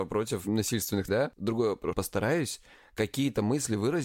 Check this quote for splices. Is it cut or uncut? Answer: cut